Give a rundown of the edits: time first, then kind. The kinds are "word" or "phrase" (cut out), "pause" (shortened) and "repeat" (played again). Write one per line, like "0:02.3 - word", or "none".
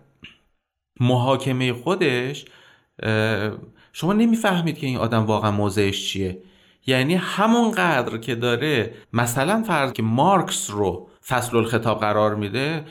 0:09.0 - pause
0:09.9 - word
0:11.2 - pause